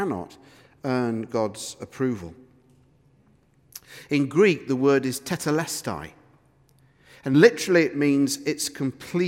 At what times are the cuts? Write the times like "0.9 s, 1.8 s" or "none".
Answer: none